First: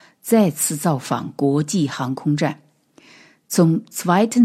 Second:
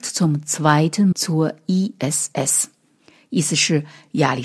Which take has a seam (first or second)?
second